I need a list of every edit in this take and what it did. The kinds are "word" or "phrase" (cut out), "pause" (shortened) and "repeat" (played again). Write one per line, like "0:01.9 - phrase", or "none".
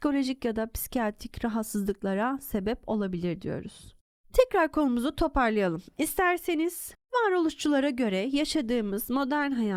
none